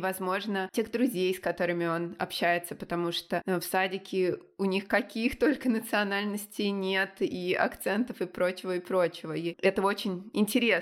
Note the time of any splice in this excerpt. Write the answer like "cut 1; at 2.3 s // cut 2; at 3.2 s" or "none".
none